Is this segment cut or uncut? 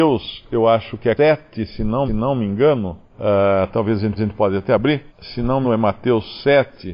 cut